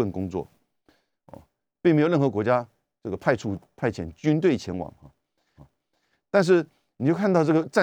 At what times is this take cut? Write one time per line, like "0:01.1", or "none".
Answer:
0:05.6